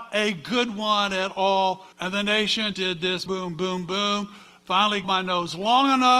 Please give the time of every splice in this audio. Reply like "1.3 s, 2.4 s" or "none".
1.9 s, 2.7 s, 3.3 s, 5.0 s

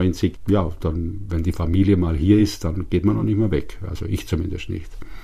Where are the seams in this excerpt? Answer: none

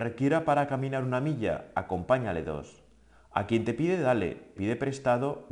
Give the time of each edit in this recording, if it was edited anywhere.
4.6 s

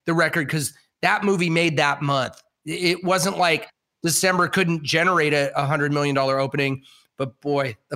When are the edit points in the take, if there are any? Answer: none

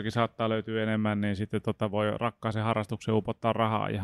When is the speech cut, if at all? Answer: none

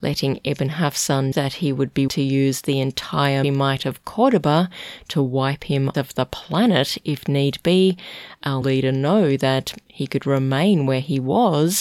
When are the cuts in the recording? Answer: 1.3 s, 2.1 s, 3.4 s, 5.9 s, 8.6 s

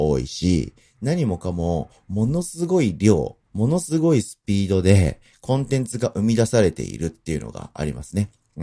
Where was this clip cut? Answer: 3.5 s

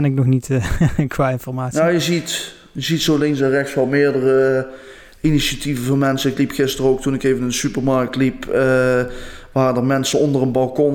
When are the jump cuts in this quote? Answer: none

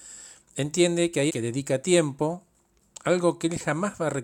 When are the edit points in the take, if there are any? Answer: 1.3 s

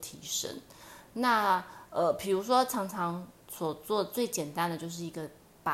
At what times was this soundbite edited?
none

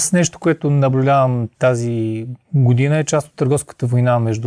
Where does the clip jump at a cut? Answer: none

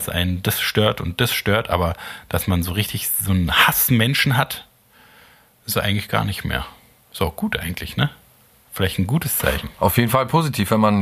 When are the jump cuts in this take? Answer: none

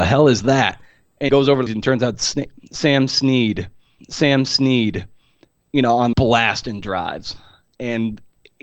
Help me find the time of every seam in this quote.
1.3 s, 1.7 s, 4.0 s, 6.1 s

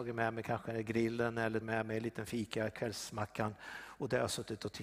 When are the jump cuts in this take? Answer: 1.6 s

